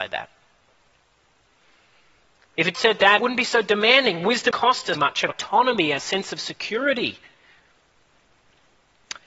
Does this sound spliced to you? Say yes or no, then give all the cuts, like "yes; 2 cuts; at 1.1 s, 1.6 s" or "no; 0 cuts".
yes; 6 cuts; at 2.7 s, 3.2 s, 4.5 s, 4.9 s, 5.3 s, 6.0 s